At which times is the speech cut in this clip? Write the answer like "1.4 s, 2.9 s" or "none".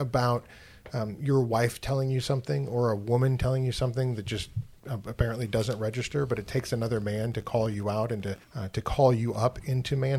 8.4 s